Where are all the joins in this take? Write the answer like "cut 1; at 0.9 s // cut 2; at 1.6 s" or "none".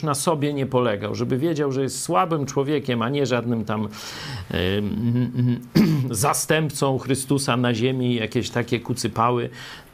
none

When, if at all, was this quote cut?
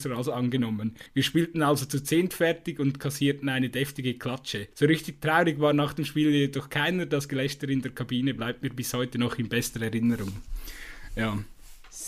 cut 1; at 1.1 s // cut 2; at 4.7 s

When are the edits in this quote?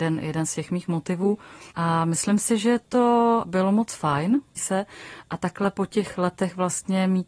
cut 1; at 1.7 s // cut 2; at 3.4 s // cut 3; at 4.6 s

